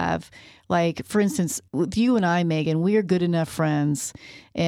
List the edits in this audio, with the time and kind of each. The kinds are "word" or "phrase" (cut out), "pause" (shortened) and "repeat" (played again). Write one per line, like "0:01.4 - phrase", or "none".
0:01.7 - pause